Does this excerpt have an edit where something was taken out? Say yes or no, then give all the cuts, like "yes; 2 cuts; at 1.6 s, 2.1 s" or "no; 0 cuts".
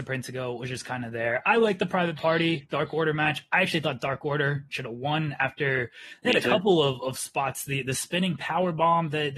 no; 0 cuts